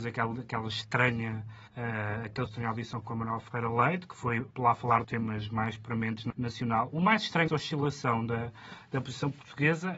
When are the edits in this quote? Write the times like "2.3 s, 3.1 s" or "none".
1.7 s, 2.5 s, 3.0 s, 4.5 s, 5.0 s, 6.3 s, 7.5 s